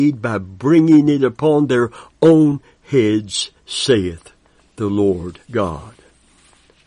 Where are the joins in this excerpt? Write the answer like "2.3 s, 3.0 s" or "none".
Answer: 3.6 s, 5.4 s